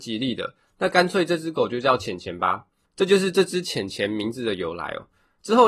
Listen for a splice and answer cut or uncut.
uncut